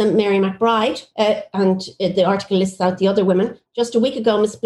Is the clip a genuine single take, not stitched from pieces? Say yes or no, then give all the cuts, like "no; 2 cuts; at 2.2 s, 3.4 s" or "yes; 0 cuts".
no; 1 cut; at 1.1 s